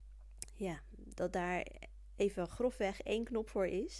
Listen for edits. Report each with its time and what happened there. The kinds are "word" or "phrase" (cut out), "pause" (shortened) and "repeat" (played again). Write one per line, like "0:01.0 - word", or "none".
none